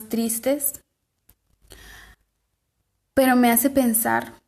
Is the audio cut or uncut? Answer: uncut